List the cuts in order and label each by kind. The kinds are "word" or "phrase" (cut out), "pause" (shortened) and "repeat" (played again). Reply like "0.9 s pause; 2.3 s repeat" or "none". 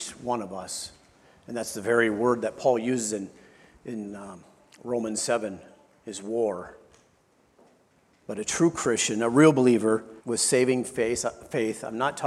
10.2 s pause